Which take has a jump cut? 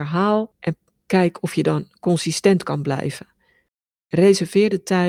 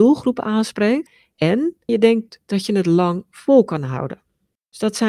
second; 1 cut; at 1.9 s

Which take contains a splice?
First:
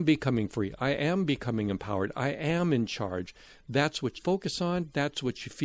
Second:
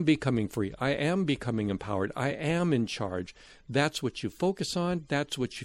first; 1 cut; at 4.2 s

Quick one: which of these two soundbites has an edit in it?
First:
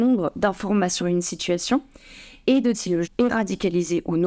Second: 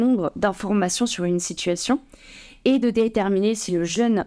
first; 3 cuts; at 1.0 s, 2.7 s, 3.0 s

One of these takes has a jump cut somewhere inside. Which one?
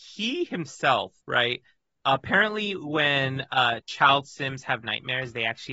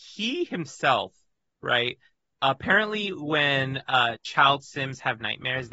first; 1 cut; at 1.2 s

